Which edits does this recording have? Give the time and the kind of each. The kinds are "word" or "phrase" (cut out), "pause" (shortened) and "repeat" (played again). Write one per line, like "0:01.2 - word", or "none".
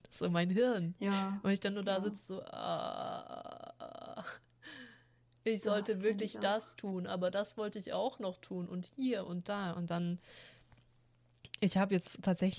none